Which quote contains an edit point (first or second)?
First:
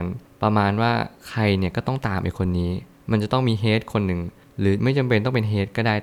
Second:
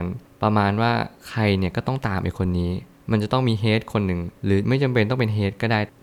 second